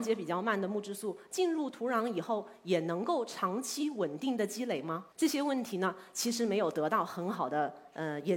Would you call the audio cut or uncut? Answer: cut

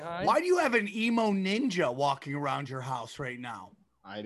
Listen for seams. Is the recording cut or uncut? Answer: uncut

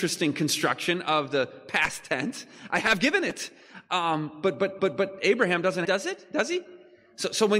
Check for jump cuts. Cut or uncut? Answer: cut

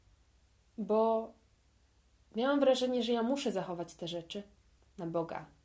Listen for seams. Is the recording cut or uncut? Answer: uncut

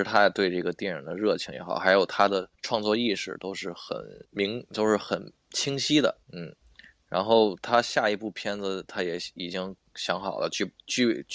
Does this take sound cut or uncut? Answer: cut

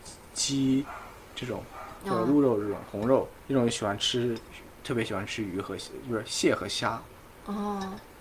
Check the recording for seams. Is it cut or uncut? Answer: uncut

